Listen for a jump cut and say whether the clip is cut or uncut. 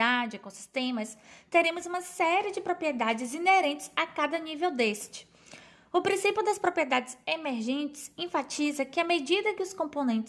uncut